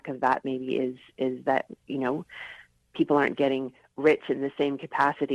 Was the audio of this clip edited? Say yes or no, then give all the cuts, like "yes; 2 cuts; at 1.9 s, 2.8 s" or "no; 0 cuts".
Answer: no; 0 cuts